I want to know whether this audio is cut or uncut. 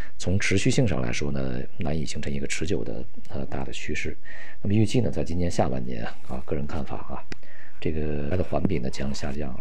cut